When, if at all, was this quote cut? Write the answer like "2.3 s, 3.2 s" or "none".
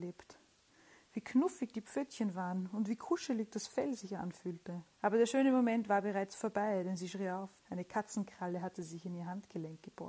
4.9 s, 7.6 s